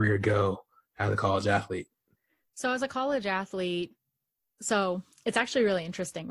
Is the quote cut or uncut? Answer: uncut